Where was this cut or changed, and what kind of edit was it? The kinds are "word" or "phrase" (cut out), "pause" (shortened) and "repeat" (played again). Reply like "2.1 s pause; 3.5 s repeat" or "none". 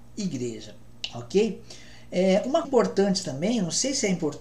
2.6 s word